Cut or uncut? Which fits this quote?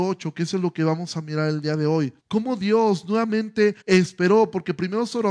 cut